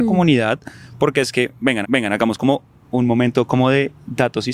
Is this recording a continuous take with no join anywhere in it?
no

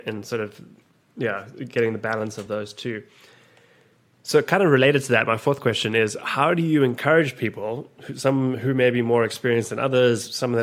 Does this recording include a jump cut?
no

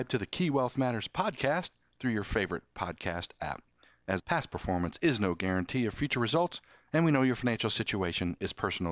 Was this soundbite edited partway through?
yes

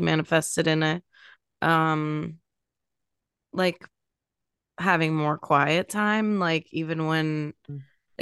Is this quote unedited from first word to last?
yes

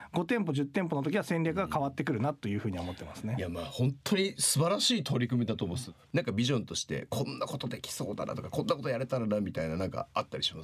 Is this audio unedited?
no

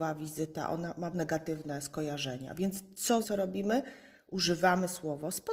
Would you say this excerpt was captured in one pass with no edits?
no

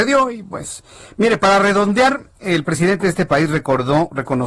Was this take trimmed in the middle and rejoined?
no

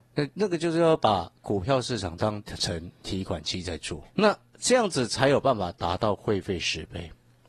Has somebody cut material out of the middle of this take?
yes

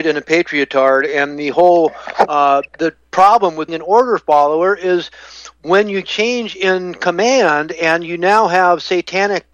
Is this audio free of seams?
no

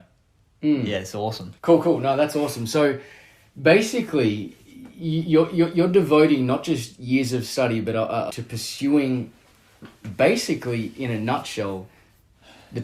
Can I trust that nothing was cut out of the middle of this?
no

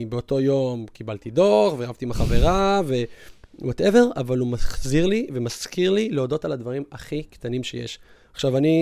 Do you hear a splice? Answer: no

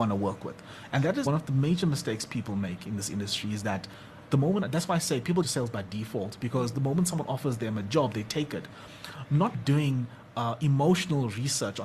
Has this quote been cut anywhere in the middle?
yes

